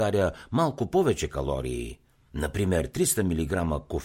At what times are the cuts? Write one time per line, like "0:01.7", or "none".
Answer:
none